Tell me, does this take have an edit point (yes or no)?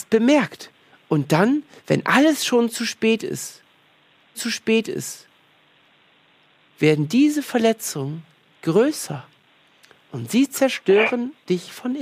yes